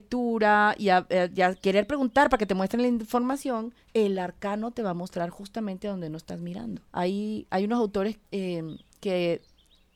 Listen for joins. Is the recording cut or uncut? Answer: cut